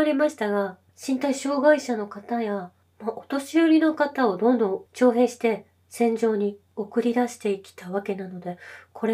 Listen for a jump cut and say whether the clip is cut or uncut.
cut